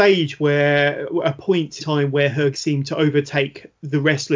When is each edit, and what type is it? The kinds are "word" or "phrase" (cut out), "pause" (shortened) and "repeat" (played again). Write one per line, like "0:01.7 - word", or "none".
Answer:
0:01.8 - word
0:02.5 - word